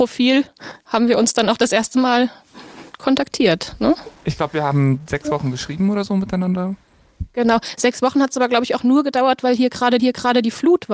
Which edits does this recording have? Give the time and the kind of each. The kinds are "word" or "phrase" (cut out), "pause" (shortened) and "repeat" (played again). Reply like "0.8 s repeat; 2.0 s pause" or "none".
10.0 s repeat